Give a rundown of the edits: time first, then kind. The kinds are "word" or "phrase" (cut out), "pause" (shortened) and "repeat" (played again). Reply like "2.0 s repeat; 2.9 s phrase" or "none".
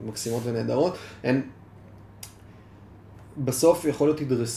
none